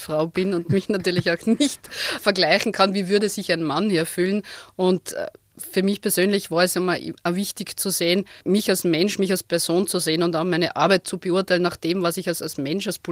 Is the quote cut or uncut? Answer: cut